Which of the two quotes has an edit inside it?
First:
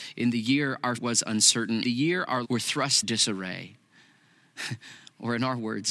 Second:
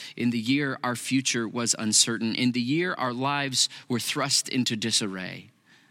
first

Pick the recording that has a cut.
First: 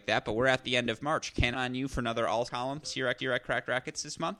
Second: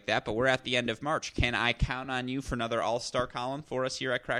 first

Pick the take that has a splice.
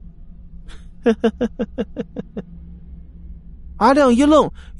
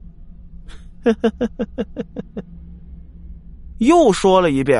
second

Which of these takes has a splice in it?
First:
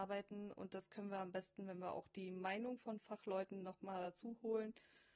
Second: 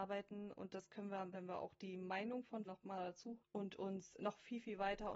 second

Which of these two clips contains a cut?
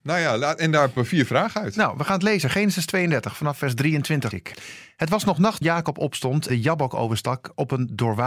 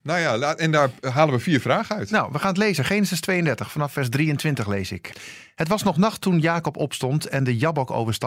first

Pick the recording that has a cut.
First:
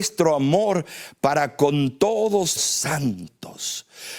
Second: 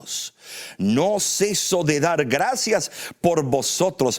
first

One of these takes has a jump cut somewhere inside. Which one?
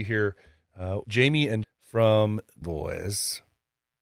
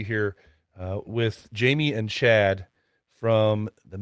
first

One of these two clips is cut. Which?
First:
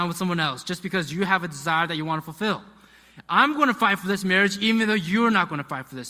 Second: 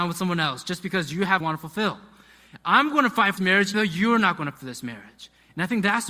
second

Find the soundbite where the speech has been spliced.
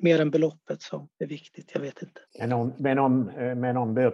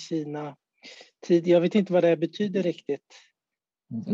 first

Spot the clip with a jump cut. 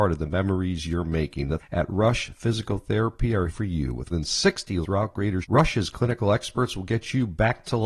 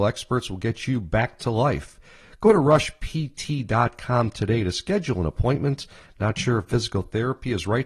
first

